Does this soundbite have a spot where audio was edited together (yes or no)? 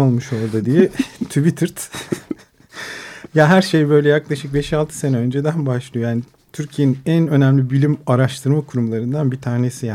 no